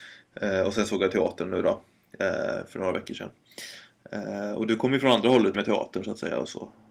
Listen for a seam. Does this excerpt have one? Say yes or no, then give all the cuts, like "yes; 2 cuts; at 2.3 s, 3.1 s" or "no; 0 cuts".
yes; 1 cut; at 5.5 s